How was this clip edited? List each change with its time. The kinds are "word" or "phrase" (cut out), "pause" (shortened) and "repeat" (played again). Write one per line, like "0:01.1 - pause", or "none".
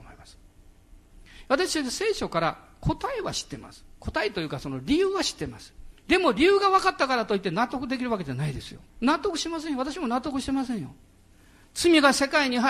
0:06.0 - pause
0:08.9 - pause